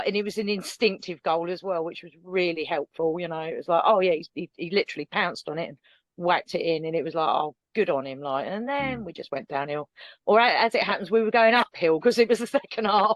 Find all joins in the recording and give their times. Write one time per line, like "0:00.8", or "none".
none